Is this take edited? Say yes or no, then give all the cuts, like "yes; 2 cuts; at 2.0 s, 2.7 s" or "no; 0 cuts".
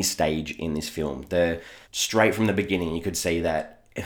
yes; 1 cut; at 1.8 s